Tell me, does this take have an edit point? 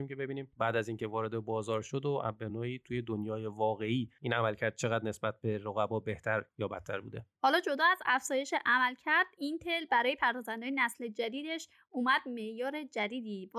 no; 0 cuts

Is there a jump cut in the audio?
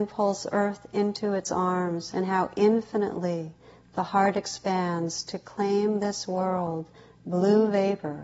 no; 0 cuts

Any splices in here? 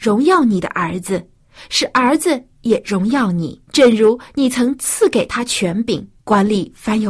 yes; 2 cuts; at 3.7 s, 6.2 s

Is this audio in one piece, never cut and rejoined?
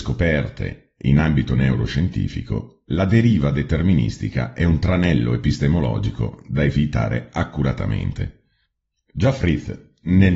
yes; 0 cuts

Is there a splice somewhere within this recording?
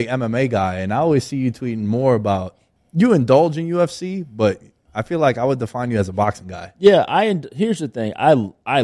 yes; 1 cut; at 2.8 s

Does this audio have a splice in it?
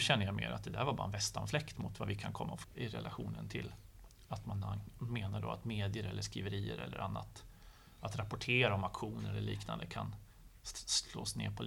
yes; 1 cut; at 2.6 s

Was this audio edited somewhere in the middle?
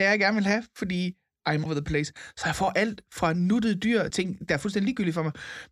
yes; 2 cuts; at 1.7 s, 4.1 s

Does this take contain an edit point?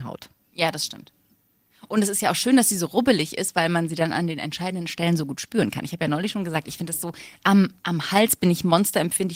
no; 0 cuts

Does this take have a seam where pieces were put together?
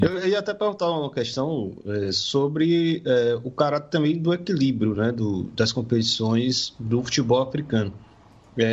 no; 0 cuts

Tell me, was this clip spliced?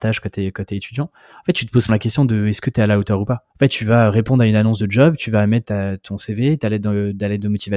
yes; 3 cuts; at 1.9 s, 3.5 s, 5.6 s

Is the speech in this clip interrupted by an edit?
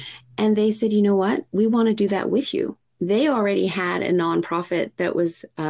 no; 0 cuts

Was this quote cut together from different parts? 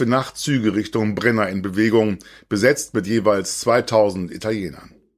no; 0 cuts

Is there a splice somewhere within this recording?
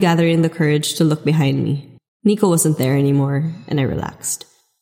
yes; 1 cut; at 2.0 s

